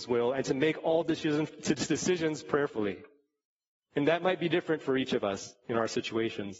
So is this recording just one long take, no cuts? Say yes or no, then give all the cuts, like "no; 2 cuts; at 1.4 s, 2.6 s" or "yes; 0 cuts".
yes; 0 cuts